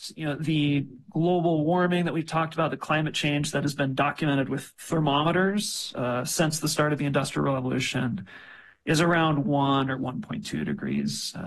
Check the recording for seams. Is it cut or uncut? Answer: uncut